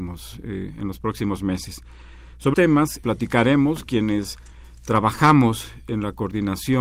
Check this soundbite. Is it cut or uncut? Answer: cut